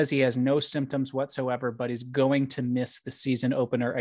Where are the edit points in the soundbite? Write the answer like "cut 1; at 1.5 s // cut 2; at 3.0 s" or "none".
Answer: none